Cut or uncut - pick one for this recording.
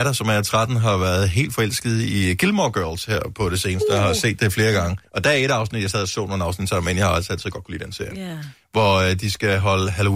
cut